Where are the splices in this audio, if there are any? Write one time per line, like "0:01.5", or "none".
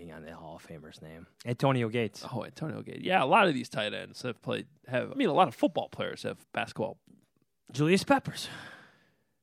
0:01.3
0:05.1
0:06.4